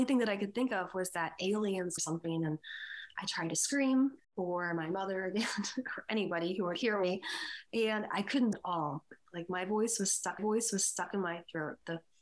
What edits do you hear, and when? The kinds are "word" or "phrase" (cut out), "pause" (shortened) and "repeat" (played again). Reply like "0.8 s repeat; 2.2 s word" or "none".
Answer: 2.0 s phrase; 3.2 s word; 4.2 s pause; 8.5 s word; 10.4 s repeat